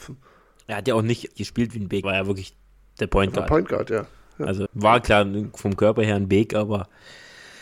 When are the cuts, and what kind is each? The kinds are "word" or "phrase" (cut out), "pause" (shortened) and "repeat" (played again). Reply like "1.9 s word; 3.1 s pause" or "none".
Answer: 1.3 s word; 2.0 s word; 4.7 s word